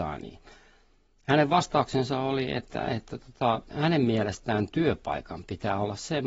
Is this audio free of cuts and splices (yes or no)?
yes